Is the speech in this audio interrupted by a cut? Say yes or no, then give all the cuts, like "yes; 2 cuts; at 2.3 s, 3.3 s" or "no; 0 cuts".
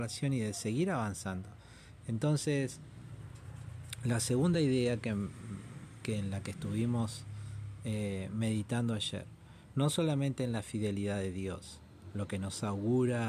no; 0 cuts